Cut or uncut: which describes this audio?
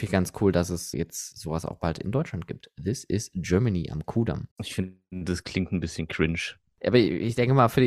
cut